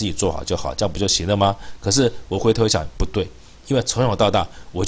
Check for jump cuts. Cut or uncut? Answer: uncut